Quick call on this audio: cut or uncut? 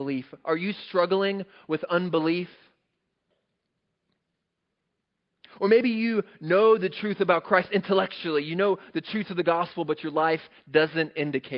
uncut